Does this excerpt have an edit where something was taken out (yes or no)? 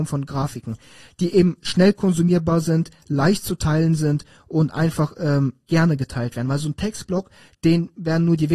no